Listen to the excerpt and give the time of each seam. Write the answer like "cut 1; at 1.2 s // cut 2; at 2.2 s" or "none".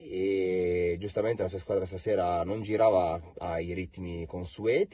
none